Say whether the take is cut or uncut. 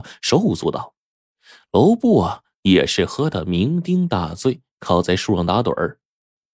uncut